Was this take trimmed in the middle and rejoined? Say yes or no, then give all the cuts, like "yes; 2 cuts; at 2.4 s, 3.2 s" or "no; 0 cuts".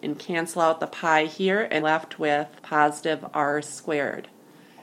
yes; 2 cuts; at 1.8 s, 2.6 s